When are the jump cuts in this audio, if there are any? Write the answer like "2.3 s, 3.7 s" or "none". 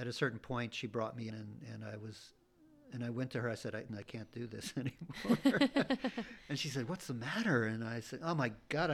1.3 s, 3.9 s